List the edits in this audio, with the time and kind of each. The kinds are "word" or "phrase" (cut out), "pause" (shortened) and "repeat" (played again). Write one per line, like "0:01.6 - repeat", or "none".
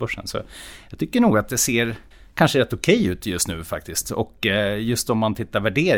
0:02.1 - pause